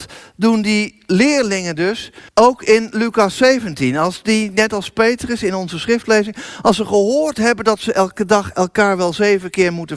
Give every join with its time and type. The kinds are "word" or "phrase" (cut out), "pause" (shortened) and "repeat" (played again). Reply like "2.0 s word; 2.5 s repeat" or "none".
2.3 s pause